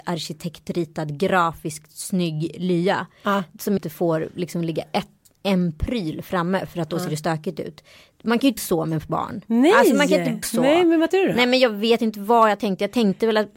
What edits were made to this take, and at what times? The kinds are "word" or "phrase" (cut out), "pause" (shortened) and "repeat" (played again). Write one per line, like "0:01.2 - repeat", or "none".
0:03.8 - word
0:08.6 - word
0:10.4 - word
0:11.1 - word